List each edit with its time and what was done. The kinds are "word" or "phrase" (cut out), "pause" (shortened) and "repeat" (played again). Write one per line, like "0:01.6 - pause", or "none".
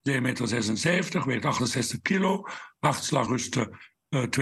0:03.3 - word